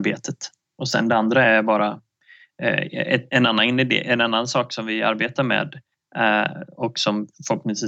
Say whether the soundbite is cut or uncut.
uncut